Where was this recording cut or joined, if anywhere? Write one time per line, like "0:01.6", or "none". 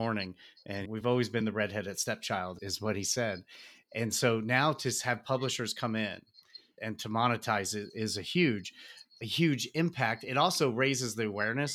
none